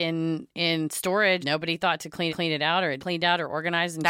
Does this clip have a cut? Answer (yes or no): yes